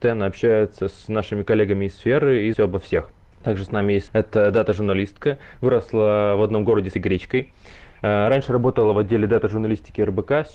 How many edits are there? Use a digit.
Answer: 3